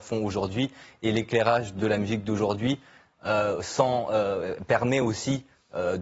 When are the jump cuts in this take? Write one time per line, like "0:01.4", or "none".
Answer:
none